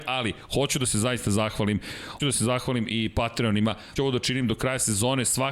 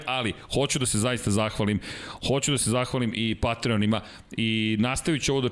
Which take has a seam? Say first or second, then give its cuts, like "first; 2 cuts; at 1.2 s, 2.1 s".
first; 2 cuts; at 2.2 s, 4.0 s